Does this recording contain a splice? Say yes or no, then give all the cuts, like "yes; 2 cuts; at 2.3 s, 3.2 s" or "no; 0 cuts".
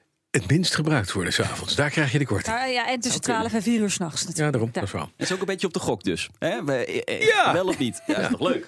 no; 0 cuts